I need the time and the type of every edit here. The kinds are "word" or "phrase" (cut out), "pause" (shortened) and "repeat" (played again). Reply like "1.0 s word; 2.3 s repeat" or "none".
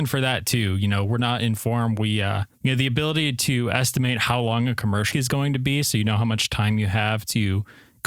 2.5 s pause; 5.1 s word

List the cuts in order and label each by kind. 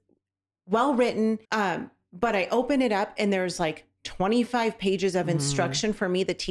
1.4 s pause

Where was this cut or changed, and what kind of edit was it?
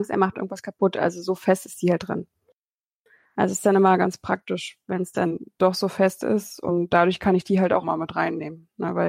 none

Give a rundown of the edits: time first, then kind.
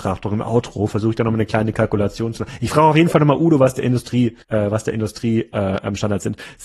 4.4 s pause

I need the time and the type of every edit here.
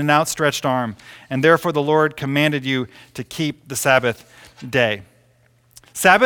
none

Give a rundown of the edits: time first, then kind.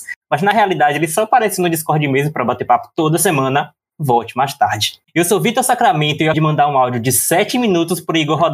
5.0 s pause; 6.3 s word

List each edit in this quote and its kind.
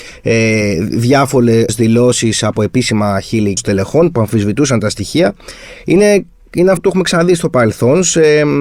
1.7 s word; 3.6 s word; 6.8 s word

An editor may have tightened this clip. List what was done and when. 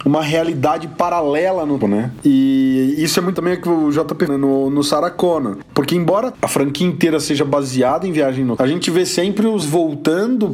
1.8 s word; 3.3 s word; 4.3 s word; 6.3 s word; 8.6 s word; 9.6 s word

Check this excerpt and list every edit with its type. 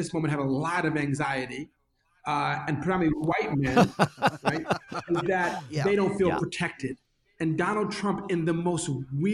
none

